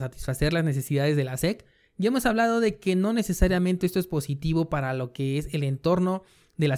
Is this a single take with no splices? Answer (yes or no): yes